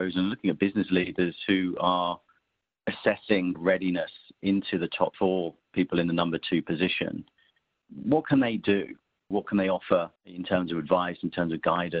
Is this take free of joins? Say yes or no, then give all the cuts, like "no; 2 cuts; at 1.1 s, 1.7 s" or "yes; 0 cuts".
no; 4 cuts; at 3.5 s, 5.1 s, 9.4 s, 10.2 s